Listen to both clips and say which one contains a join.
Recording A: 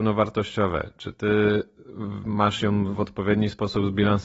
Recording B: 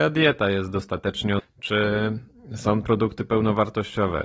B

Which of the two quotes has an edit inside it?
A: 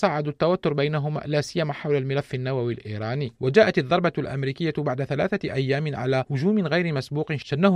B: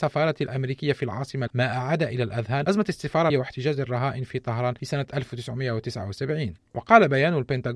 B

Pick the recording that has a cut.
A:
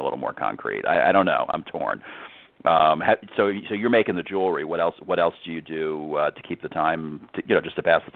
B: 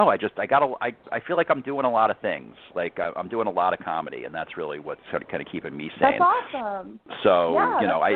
B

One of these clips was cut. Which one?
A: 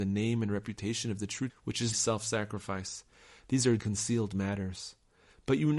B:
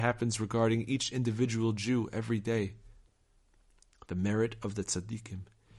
A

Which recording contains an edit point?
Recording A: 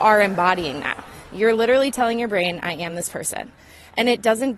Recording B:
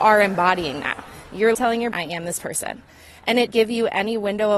B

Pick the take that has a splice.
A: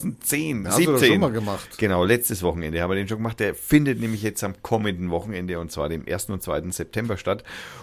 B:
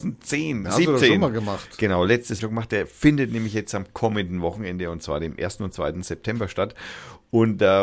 B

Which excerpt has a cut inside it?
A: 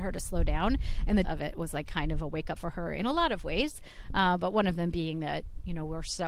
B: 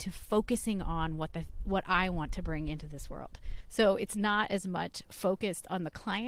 A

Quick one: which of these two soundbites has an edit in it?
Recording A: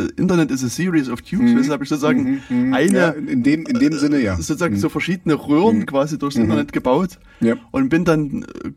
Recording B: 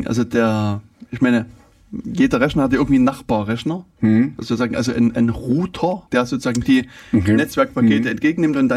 B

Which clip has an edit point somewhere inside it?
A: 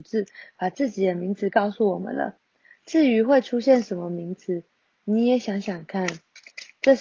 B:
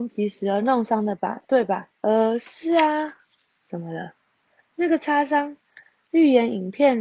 B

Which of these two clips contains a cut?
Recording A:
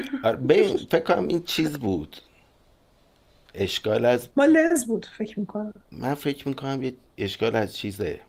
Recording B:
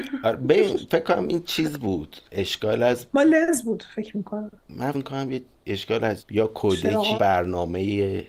B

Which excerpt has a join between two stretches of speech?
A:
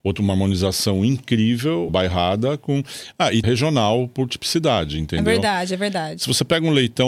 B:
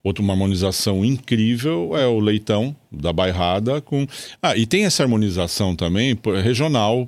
A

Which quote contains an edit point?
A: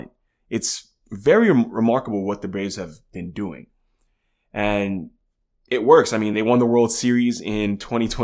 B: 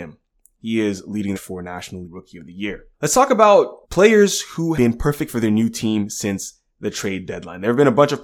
B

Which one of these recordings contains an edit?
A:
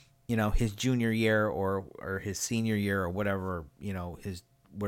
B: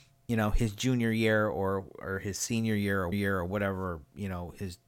B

